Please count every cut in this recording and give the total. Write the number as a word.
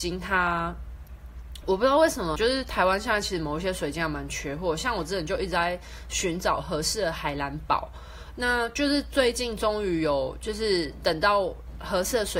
one